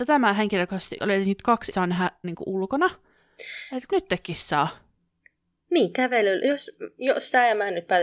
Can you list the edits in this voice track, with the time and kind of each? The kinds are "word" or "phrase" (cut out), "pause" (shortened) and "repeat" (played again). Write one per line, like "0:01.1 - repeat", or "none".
0:01.0 - word
0:01.7 - word
0:02.2 - word
0:03.9 - word